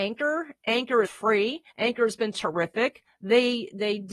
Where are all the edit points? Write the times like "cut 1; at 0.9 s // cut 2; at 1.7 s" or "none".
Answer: cut 1; at 1.0 s // cut 2; at 1.7 s

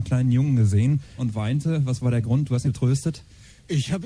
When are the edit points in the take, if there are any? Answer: cut 1; at 1.2 s // cut 2; at 2.6 s

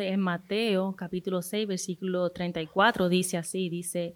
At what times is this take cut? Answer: none

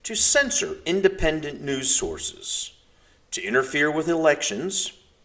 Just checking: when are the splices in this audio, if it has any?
none

